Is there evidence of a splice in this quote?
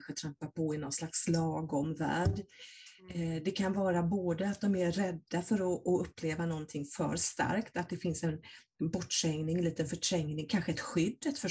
no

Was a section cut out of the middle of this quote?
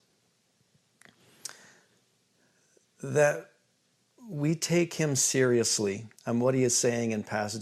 yes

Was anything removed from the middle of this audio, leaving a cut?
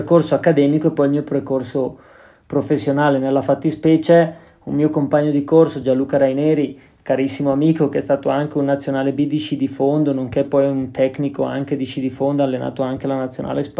no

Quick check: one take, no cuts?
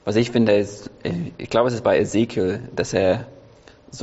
yes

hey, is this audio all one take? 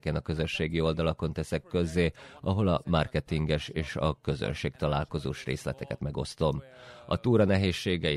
no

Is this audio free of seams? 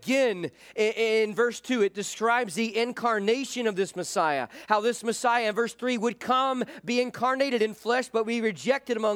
yes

